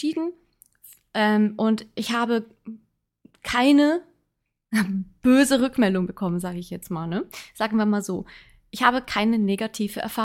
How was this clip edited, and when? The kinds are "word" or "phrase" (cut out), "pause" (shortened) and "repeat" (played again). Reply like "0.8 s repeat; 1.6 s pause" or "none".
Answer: none